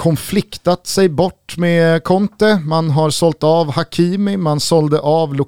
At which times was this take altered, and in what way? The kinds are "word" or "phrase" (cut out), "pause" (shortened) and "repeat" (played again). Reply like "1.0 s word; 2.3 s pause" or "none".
none